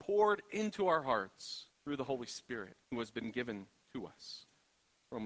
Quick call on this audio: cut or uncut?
cut